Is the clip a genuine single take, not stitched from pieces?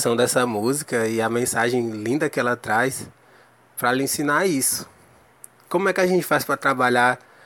yes; 0 cuts

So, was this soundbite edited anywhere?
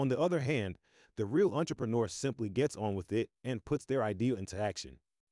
no; 0 cuts

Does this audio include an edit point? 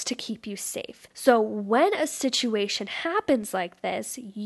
yes; 1 cut; at 1.1 s

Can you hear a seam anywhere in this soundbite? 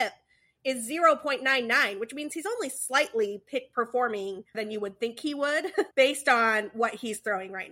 yes; 2 cuts; at 4.5 s, 5.9 s

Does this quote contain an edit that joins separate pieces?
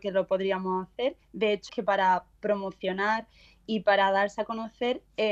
yes; 2 cuts; at 1.2 s, 1.7 s

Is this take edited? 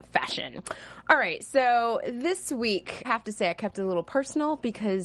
yes; 1 cut; at 3.0 s

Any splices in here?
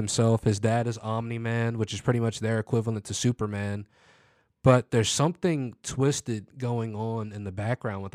no; 0 cuts

